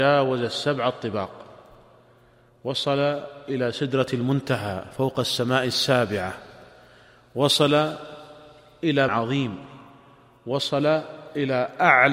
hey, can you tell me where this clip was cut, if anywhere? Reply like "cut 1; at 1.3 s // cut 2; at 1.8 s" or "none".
cut 1; at 9.1 s